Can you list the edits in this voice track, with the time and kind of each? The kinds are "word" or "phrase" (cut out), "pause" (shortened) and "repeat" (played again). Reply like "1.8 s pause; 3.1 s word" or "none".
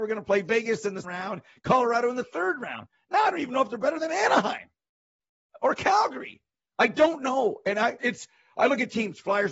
1.0 s word; 8.0 s word